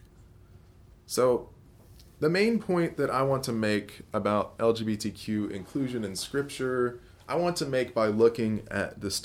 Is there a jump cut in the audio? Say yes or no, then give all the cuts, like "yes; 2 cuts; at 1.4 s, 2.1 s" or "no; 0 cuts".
no; 0 cuts